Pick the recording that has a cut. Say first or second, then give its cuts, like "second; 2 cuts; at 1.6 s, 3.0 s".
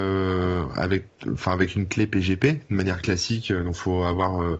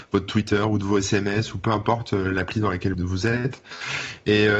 second; 1 cut; at 2.9 s